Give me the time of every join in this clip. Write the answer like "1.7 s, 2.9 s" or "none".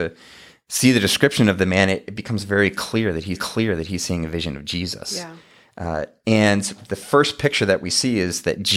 3.3 s

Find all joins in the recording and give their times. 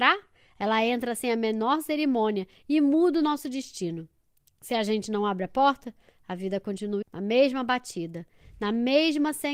7.0 s

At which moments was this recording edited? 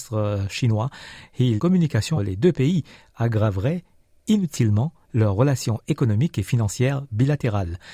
1.6 s, 2.2 s

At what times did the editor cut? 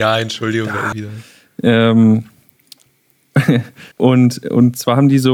0.9 s, 3.9 s

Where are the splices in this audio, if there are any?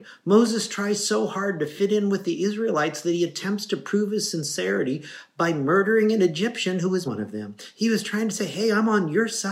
7.1 s

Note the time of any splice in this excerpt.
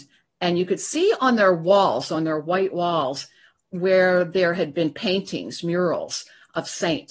none

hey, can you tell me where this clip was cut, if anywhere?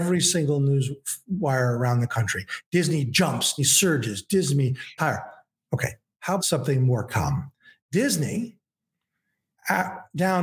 3.6 s, 5.0 s, 6.4 s

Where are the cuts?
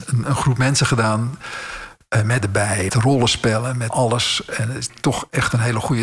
2.4 s, 2.9 s, 3.9 s, 4.9 s

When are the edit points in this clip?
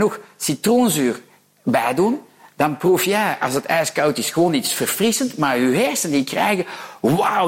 none

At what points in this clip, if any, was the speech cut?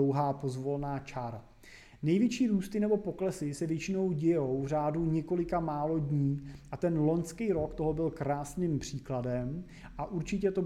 none

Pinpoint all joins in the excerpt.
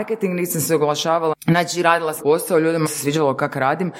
1.3 s, 2.2 s, 2.9 s

